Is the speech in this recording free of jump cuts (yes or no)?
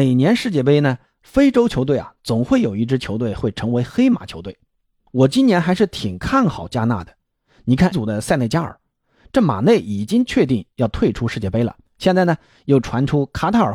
no